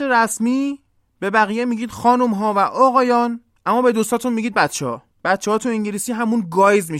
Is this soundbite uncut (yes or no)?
yes